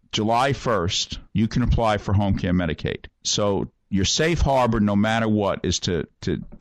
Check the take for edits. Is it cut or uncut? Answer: cut